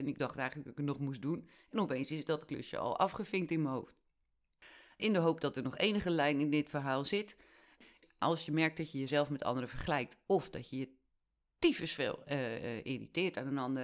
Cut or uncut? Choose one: uncut